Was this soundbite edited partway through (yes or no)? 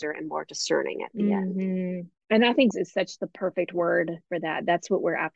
yes